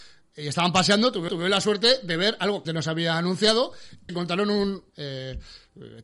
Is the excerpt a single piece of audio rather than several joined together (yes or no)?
no